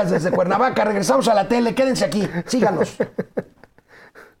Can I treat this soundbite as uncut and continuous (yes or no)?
yes